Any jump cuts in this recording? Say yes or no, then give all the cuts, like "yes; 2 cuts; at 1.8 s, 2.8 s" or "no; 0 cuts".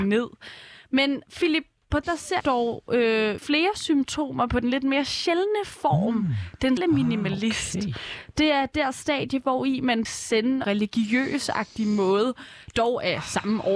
yes; 7 cuts; at 1.3 s, 2.0 s, 2.4 s, 3.4 s, 6.8 s, 10.0 s, 10.6 s